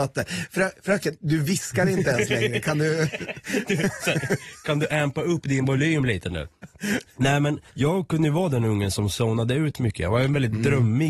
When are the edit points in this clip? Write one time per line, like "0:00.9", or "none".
0:07.7